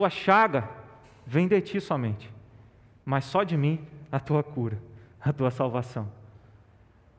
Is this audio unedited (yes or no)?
yes